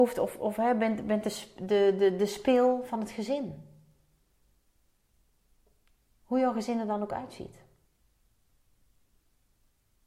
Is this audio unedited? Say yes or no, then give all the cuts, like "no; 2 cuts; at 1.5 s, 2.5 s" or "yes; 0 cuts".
yes; 0 cuts